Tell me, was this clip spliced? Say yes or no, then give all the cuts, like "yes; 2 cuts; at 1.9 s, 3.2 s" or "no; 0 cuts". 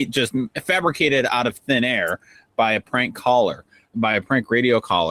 yes; 1 cut; at 3.9 s